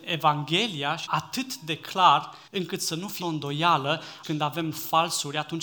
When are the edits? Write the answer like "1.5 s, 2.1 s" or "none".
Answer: 1.1 s, 2.5 s, 3.2 s, 4.2 s